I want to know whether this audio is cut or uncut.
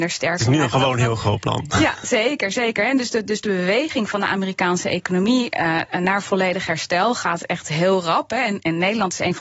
uncut